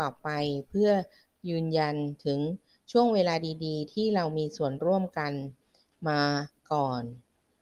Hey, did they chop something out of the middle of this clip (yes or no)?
no